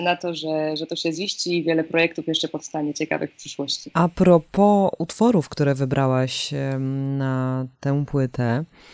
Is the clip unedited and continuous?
no; 1 cut; at 7.7 s

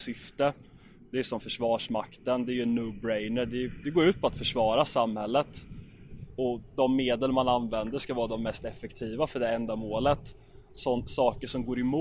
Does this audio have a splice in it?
no; 0 cuts

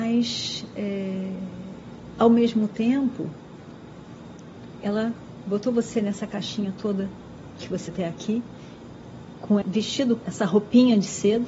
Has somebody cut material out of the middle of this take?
yes; 3 cuts; at 7.9 s, 9.6 s, 10.2 s

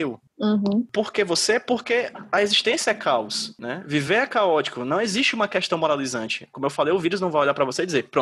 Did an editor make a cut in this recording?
no; 0 cuts

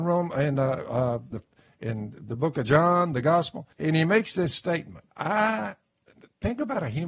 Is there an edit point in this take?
yes; 3 cuts; at 1.3 s, 3.7 s, 5.1 s

